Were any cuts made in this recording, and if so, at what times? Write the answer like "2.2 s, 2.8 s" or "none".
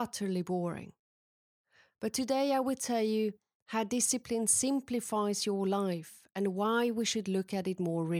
none